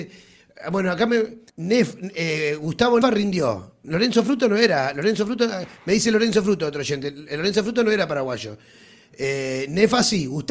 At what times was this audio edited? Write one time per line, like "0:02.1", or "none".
0:01.5
0:03.0